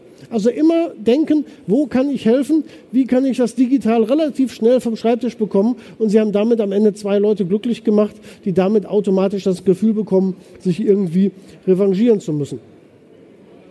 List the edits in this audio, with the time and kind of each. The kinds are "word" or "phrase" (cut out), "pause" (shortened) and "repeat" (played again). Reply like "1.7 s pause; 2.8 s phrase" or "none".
none